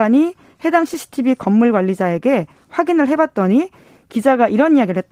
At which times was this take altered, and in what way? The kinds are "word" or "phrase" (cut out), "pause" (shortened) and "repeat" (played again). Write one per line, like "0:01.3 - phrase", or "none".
none